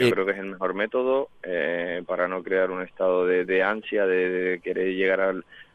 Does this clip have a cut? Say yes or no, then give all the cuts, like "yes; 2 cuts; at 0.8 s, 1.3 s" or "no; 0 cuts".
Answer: yes; 1 cut; at 3.4 s